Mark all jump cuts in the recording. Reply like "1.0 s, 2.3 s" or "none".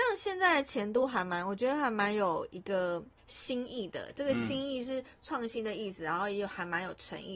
3.2 s